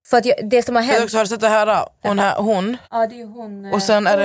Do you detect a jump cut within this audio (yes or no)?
yes